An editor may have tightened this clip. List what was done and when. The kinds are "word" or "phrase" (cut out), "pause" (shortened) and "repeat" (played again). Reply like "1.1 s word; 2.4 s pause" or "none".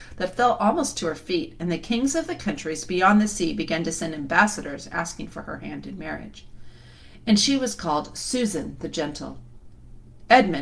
none